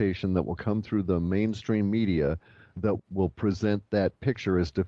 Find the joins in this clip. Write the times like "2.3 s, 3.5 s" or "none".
3.0 s